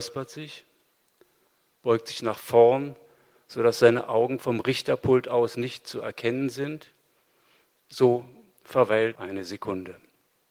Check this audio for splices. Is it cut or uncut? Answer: cut